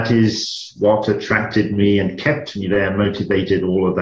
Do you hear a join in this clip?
no; 0 cuts

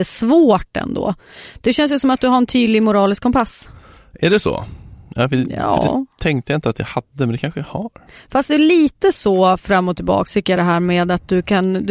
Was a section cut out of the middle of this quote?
no; 0 cuts

